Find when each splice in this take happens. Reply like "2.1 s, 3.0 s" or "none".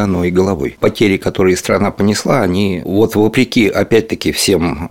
none